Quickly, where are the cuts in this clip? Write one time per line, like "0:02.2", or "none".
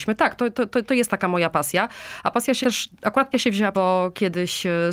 0:02.6
0:03.3
0:03.7